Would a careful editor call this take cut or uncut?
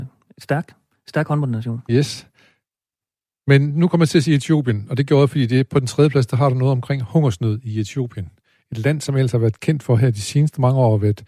uncut